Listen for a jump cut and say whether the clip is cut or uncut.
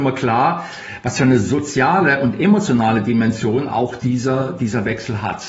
uncut